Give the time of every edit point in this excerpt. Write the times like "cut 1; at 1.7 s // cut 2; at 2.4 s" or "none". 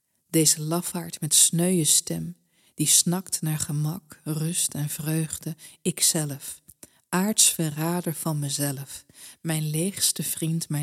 none